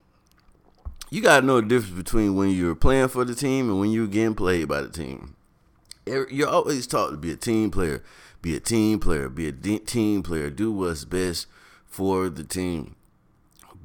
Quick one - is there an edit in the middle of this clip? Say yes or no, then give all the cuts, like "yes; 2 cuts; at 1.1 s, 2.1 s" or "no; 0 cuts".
no; 0 cuts